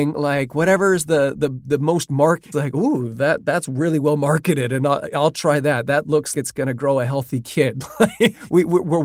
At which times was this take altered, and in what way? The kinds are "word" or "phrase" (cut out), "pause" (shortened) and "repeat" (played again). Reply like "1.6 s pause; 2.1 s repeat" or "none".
2.5 s word; 6.3 s word